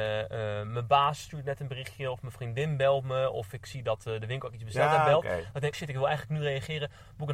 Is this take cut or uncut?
cut